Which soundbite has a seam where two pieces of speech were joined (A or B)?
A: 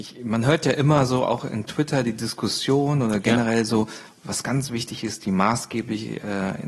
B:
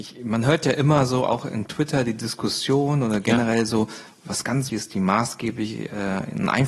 B